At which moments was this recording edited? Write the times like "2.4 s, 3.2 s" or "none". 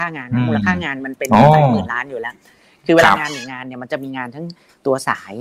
none